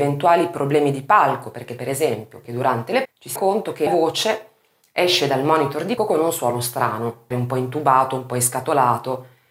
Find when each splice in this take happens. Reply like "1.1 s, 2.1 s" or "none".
2.4 s, 3.0 s, 3.4 s, 3.9 s, 6.0 s, 7.3 s